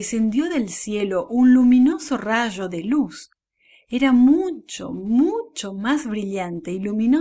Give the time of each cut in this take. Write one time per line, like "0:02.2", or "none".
none